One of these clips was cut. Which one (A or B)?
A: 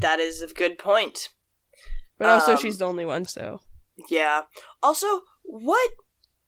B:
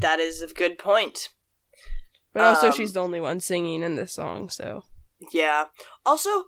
A